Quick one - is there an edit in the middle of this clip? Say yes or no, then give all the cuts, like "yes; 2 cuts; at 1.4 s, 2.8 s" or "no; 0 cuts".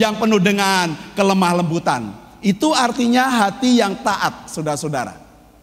no; 0 cuts